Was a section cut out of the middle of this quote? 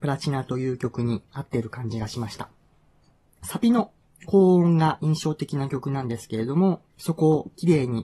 yes; 2 cuts; at 1.3 s, 6.9 s

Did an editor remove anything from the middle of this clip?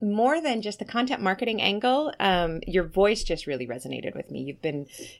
no; 0 cuts

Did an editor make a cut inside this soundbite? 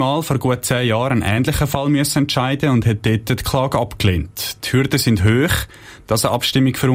no; 0 cuts

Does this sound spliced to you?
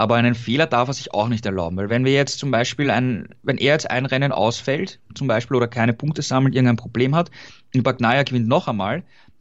no; 0 cuts

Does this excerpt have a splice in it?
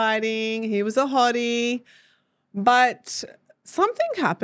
no; 0 cuts

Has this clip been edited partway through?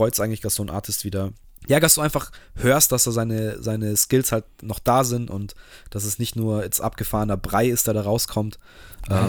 yes; 1 cut; at 1.4 s

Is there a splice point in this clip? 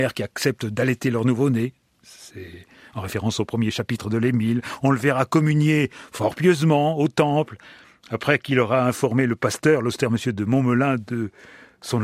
no; 0 cuts

